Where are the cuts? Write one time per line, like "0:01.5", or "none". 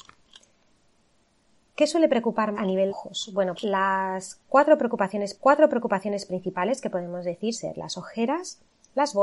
0:02.5
0:02.9
0:03.6
0:05.3
0:07.5